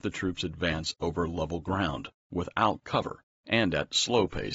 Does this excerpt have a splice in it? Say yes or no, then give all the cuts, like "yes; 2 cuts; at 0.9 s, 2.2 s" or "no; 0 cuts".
no; 0 cuts